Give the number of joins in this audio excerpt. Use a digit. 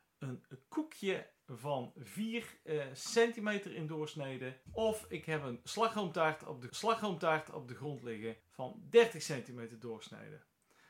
3